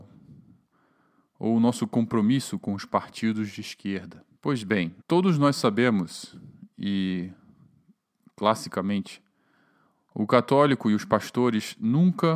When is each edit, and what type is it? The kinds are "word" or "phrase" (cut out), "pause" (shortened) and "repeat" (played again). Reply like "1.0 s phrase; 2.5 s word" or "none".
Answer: 4.4 s pause; 5.0 s pause